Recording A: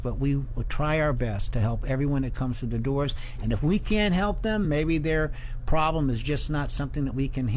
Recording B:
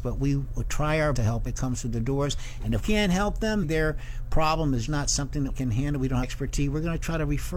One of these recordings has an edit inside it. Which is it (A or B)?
B